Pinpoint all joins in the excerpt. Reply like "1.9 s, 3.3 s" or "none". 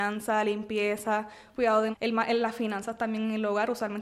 1.9 s